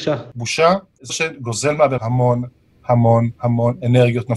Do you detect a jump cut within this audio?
yes; 3 cuts; at 1.1 s, 2.0 s, 3.4 s

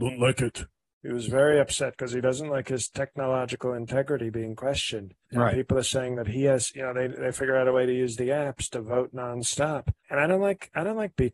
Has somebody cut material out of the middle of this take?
yes; 2 cuts; at 5.2 s, 10.0 s

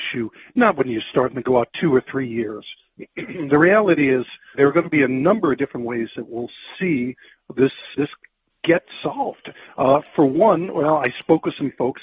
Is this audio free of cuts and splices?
no; 2 cuts; at 4.5 s, 7.9 s

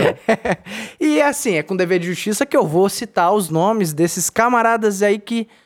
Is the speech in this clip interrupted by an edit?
no; 0 cuts

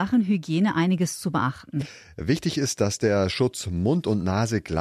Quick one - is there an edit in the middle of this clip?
no; 0 cuts

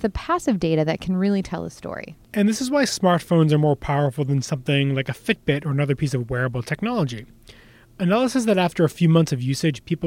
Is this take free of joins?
yes; 0 cuts

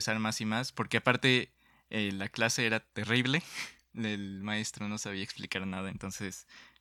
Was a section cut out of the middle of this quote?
no; 0 cuts

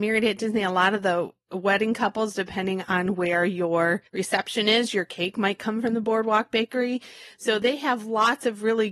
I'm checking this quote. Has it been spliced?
yes; 1 cut; at 4.1 s

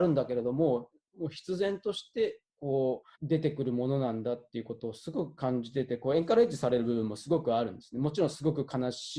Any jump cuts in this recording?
yes; 1 cut; at 3.1 s

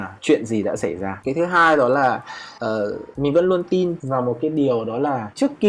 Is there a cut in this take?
no; 0 cuts

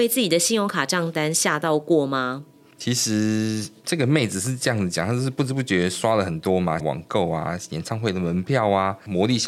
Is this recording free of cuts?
no; 1 cut; at 6.8 s

